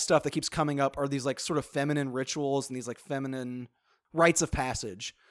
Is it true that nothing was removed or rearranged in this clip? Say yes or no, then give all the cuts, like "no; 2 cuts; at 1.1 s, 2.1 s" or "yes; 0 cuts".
yes; 0 cuts